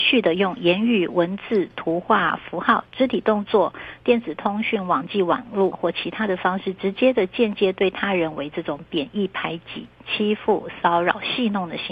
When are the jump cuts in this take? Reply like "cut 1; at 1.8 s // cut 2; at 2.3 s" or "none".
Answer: cut 1; at 5.7 s